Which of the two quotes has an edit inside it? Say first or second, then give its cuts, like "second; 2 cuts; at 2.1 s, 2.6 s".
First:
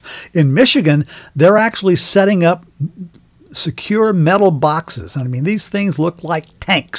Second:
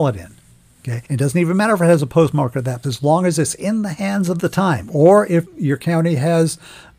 second; 4 cuts; at 1.0 s, 2.8 s, 4.4 s, 5.4 s